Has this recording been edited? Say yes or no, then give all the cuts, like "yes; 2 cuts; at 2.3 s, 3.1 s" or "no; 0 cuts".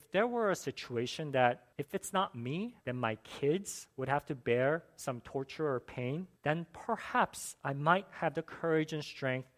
yes; 3 cuts; at 1.7 s, 2.8 s, 6.4 s